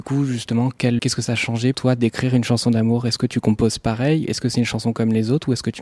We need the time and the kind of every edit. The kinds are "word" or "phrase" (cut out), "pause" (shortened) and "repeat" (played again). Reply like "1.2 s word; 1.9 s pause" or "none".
1.0 s word; 1.7 s word